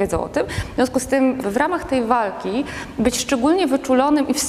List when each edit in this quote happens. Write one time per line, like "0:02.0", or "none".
0:01.4